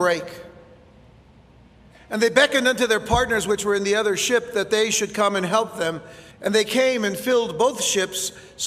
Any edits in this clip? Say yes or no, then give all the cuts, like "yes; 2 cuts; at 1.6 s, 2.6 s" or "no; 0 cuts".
yes; 1 cut; at 6.3 s